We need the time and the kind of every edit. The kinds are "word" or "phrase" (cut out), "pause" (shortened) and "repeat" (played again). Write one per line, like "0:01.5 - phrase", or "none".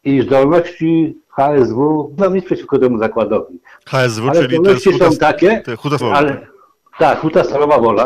0:02.2 - word
0:06.0 - word